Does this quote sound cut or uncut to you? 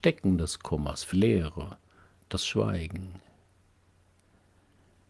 cut